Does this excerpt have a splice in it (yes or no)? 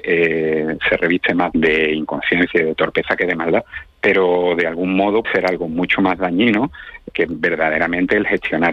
yes